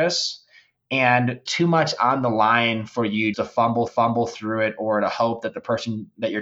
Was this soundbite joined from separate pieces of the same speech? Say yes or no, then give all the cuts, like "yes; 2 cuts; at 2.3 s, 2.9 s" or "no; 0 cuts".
yes; 3 cuts; at 1.5 s, 3.3 s, 3.9 s